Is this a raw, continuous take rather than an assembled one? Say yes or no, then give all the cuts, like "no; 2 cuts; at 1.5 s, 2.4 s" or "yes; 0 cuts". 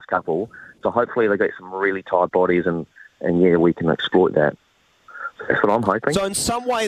yes; 0 cuts